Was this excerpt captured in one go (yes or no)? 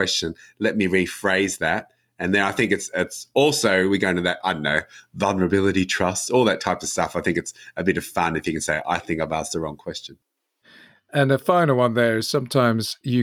yes